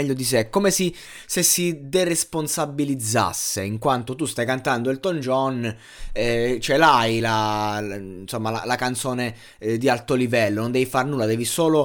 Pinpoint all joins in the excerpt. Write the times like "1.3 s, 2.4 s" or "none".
none

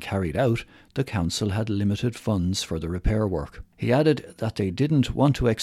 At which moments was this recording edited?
3.7 s

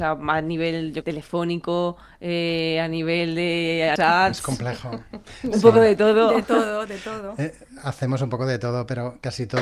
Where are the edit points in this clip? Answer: 1.0 s, 4.0 s

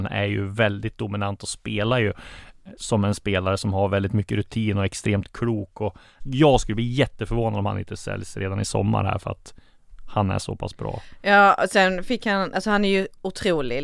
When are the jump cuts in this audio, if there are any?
6.2 s

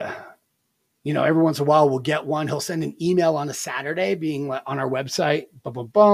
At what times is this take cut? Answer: none

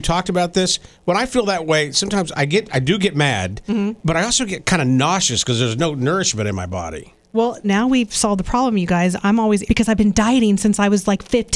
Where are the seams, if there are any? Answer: 7.6 s, 9.7 s

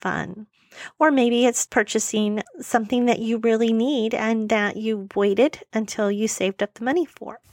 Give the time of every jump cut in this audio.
1.7 s

